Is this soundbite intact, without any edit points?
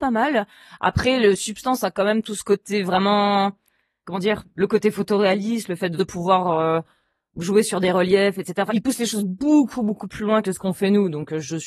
no; 3 cuts; at 4.0 s, 6.0 s, 8.7 s

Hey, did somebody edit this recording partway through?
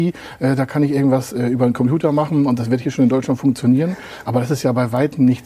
no; 0 cuts

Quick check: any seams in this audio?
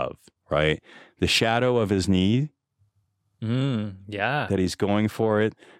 no; 0 cuts

